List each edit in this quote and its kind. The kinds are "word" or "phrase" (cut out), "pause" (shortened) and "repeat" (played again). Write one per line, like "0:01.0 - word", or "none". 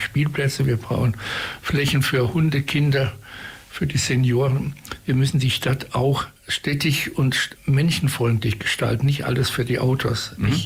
0:06.4 - pause
0:07.6 - word